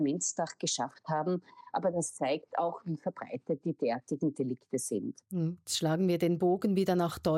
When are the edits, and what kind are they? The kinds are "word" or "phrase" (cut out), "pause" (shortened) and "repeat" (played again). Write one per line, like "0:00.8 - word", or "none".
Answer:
0:05.3 - pause